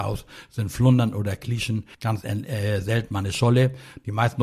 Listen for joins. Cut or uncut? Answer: cut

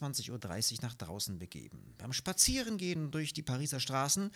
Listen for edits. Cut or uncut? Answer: uncut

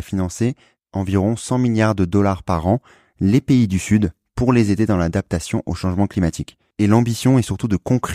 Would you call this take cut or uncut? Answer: uncut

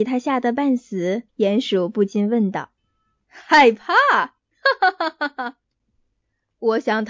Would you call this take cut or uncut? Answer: cut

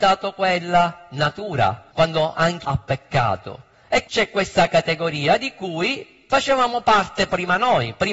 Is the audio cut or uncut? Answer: cut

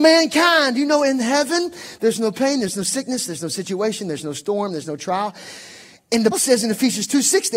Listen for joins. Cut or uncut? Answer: cut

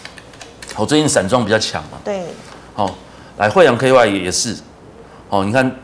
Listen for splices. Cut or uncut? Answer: uncut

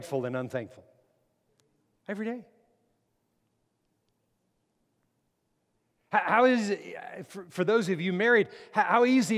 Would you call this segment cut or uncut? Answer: uncut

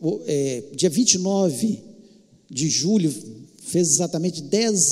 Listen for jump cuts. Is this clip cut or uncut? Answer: uncut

